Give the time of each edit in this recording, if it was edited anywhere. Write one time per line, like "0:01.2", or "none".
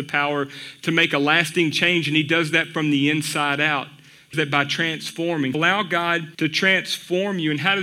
0:04.3
0:05.5
0:06.3